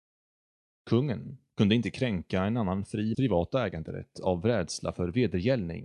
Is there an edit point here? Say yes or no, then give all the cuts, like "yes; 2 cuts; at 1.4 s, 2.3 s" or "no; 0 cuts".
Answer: yes; 1 cut; at 3.1 s